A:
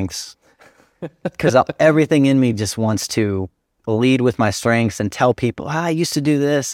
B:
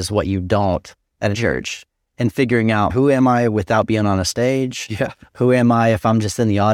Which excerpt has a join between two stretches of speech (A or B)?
B